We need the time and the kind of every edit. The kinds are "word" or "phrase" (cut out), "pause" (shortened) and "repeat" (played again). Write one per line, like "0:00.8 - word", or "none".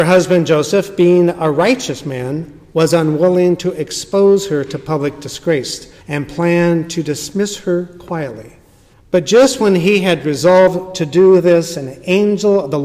0:06.0 - pause
0:08.9 - pause

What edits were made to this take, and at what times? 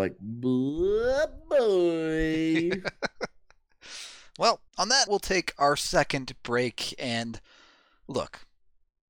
0:04.7 - pause
0:05.1 - word

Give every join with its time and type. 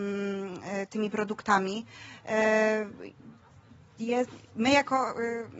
none

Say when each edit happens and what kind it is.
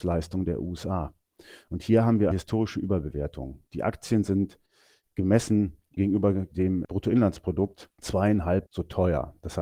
0:02.3 - word
0:08.7 - word

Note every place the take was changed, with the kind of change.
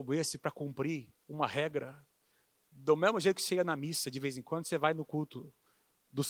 0:01.1 - pause

